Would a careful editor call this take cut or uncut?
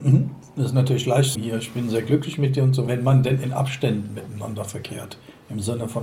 cut